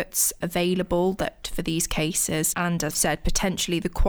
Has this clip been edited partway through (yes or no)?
yes